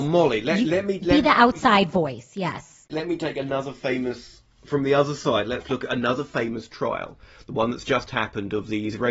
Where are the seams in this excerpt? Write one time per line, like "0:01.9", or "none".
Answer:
none